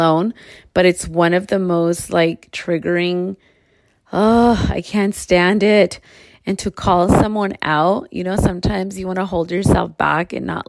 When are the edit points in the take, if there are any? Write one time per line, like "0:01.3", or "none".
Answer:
none